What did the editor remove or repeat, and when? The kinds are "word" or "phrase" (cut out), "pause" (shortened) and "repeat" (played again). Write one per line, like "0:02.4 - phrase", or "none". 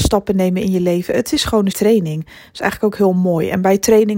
0:01.7 - word